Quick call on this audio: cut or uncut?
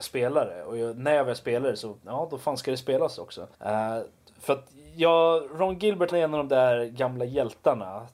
cut